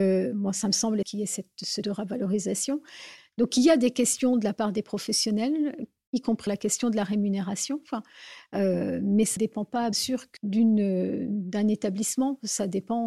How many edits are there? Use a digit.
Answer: 7